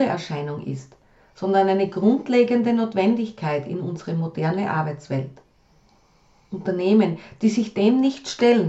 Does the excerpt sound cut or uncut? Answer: uncut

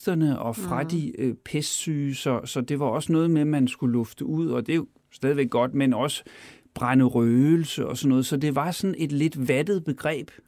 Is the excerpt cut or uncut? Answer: uncut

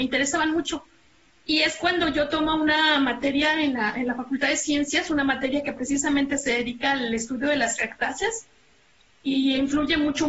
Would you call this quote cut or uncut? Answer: uncut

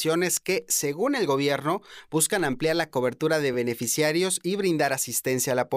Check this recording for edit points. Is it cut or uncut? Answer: uncut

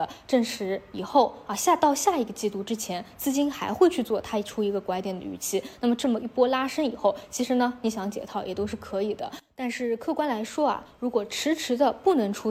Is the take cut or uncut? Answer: uncut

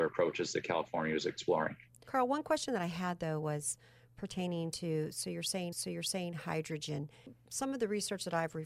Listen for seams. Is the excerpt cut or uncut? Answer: cut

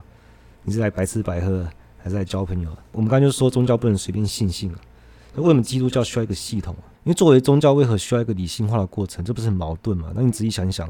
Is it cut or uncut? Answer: uncut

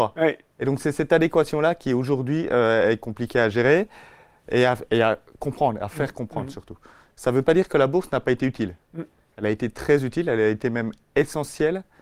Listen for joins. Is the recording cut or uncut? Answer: uncut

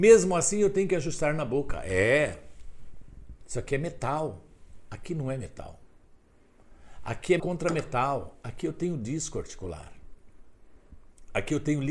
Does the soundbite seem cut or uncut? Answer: cut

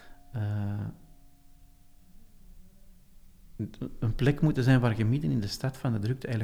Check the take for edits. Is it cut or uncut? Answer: uncut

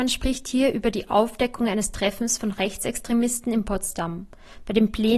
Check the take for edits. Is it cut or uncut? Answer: uncut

